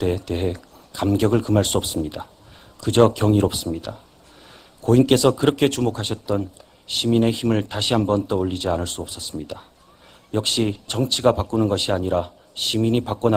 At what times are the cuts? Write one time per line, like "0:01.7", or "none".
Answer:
0:10.9